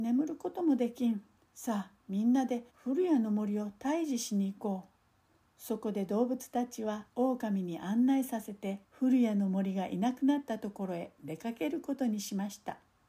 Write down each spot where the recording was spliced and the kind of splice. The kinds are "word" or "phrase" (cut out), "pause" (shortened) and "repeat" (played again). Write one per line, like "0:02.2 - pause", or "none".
0:01.4 - pause
0:02.7 - pause
0:05.4 - pause
0:07.1 - pause
0:08.8 - pause